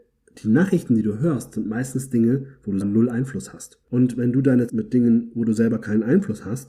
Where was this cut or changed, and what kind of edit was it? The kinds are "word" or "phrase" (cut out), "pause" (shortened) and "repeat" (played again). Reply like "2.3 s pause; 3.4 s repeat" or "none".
2.8 s word; 3.8 s pause; 4.7 s phrase